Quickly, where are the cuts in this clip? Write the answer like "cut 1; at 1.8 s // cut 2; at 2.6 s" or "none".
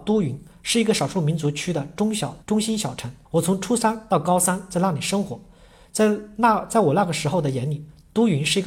cut 1; at 2.4 s // cut 2; at 3.3 s

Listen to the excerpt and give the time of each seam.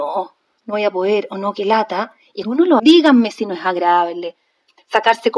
cut 1; at 2.4 s // cut 2; at 2.8 s

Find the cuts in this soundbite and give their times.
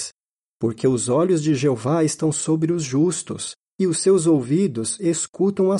none

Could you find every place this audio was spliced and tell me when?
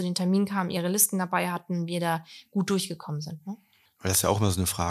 cut 1; at 3.9 s

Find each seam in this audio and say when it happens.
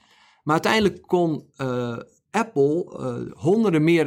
none

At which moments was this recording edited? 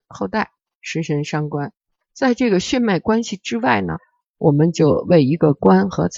none

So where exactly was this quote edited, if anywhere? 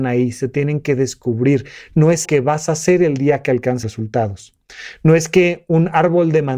cut 1; at 2.2 s // cut 2; at 3.8 s

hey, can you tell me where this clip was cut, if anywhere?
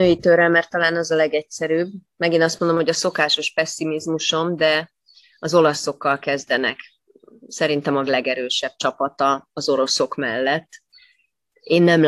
cut 1; at 8.0 s

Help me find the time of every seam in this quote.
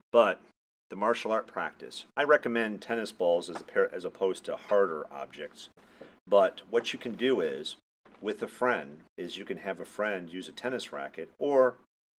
cut 1; at 9.1 s

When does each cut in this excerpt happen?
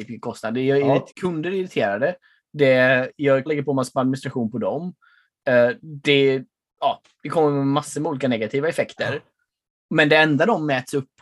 cut 1; at 1.1 s // cut 2; at 3.5 s

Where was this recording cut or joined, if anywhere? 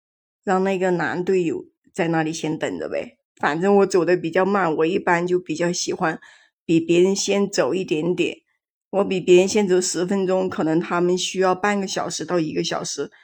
cut 1; at 3.2 s

